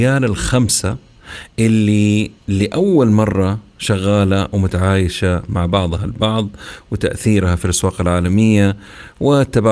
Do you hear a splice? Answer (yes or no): yes